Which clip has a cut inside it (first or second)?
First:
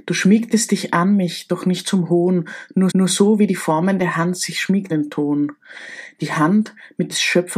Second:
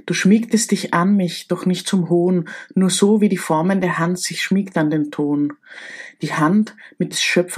first